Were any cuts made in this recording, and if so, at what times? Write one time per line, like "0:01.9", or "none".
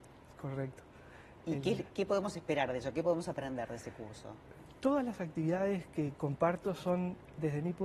0:01.9

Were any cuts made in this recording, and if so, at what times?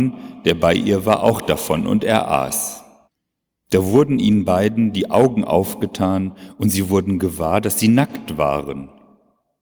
0:03.0

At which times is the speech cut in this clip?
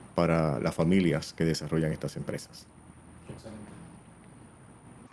none

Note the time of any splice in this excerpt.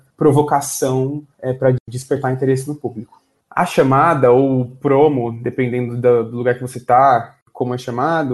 none

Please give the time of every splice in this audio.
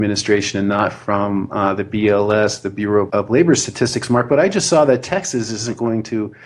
0:03.1

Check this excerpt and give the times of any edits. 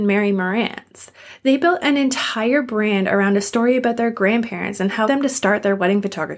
0:05.1

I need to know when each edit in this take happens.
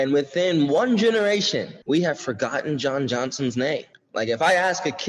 0:01.8
0:03.9

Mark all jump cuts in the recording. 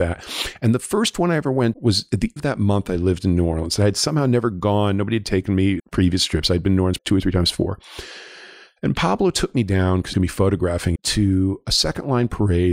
0:01.7
0:02.4
0:05.8
0:07.0
0:10.1
0:11.0

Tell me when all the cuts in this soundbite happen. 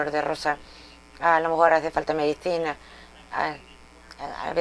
none

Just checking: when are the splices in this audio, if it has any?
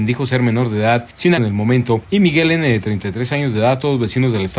0:01.4

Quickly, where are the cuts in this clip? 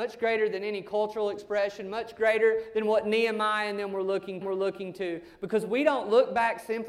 0:04.4

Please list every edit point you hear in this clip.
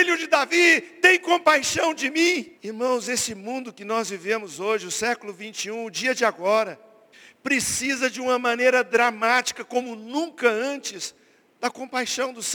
0:02.6
0:07.1

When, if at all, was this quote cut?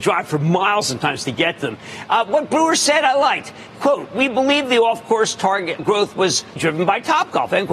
0:05.8
0:06.6

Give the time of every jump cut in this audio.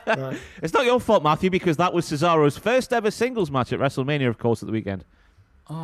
none

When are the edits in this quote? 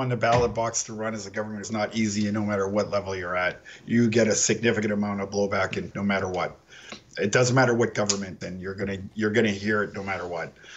0:01.6
0:05.9
0:08.4

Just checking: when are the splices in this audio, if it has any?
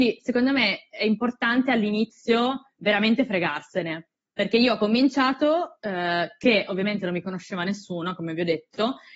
none

